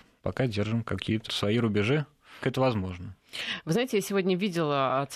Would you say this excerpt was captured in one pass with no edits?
no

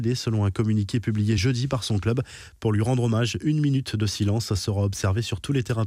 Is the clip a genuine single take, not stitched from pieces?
yes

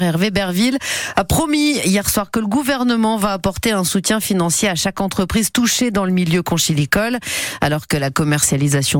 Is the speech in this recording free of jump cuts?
yes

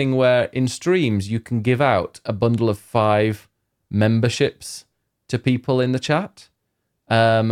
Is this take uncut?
yes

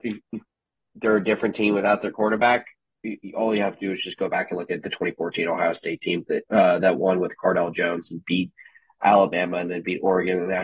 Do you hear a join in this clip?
no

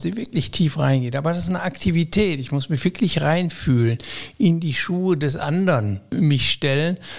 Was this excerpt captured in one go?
yes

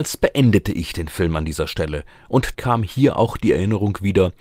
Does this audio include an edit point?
yes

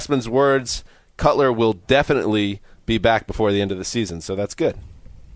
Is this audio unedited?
yes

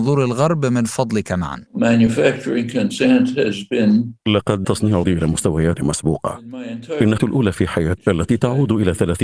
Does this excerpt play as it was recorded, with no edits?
no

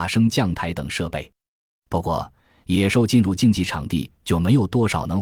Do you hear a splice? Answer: no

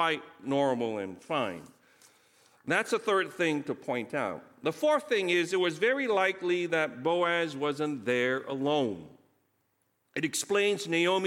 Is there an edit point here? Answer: no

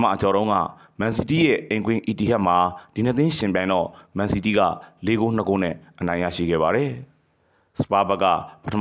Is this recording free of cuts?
yes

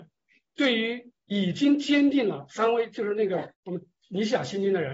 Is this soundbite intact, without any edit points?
no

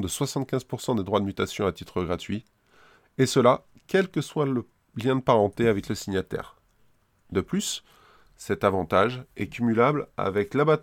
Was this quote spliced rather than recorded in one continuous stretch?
no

